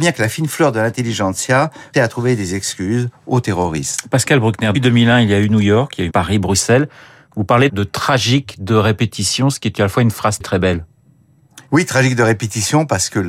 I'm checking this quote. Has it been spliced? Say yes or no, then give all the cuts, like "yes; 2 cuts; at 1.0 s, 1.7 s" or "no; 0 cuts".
yes; 6 cuts; at 1.9 s, 4.7 s, 6.1 s, 7.7 s, 10.4 s, 11.7 s